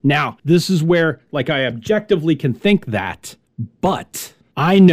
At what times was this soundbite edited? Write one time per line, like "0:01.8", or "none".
none